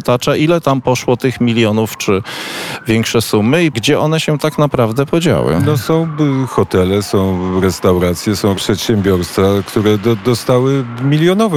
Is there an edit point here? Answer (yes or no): yes